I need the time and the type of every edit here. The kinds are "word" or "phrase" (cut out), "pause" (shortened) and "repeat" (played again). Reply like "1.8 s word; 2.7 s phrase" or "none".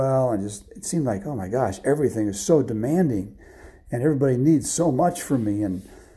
none